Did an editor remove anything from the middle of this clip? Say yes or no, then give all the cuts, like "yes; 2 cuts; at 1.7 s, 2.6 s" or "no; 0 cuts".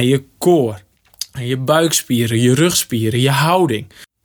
no; 0 cuts